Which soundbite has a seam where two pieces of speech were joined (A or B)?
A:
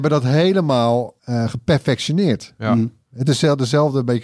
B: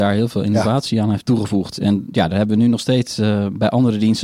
A